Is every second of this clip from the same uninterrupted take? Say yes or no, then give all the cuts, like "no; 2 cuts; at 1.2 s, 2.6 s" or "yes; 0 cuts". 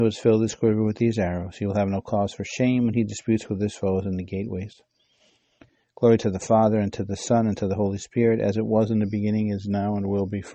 yes; 0 cuts